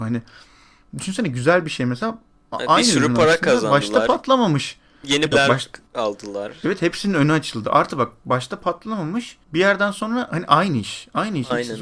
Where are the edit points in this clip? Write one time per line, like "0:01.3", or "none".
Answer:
0:05.3
0:09.4